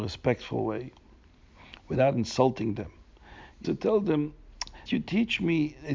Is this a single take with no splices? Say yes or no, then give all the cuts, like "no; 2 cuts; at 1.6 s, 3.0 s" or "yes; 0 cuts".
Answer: no; 2 cuts; at 3.6 s, 4.9 s